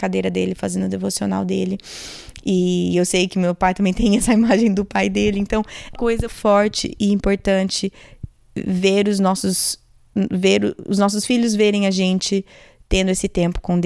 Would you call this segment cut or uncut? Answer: cut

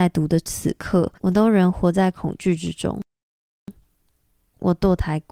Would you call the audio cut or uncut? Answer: cut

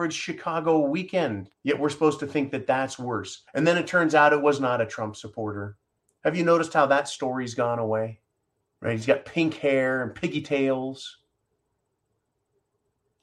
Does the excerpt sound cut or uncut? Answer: cut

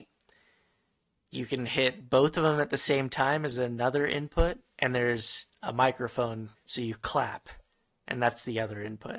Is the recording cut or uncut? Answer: cut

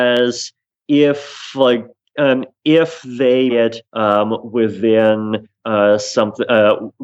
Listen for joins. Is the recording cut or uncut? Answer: cut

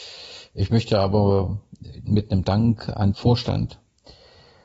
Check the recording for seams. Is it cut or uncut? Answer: cut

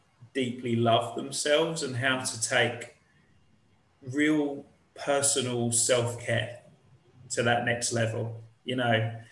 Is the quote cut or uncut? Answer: uncut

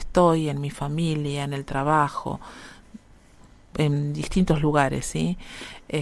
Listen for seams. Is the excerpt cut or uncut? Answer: uncut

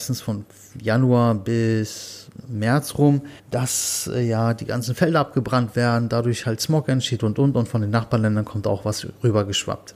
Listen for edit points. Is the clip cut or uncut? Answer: cut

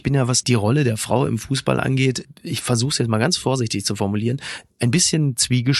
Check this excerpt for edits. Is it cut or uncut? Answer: uncut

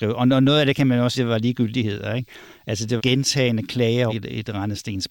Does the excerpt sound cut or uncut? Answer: cut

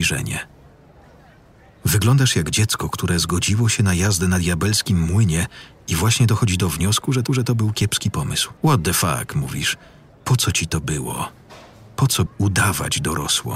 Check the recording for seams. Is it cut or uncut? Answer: cut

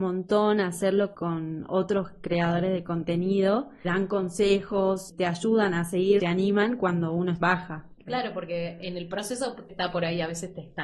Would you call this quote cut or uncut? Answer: cut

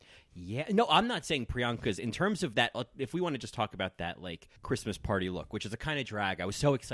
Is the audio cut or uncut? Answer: cut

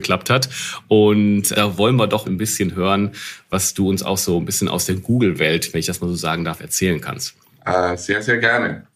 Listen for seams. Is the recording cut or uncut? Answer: cut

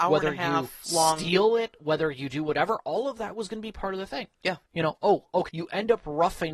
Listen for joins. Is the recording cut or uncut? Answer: cut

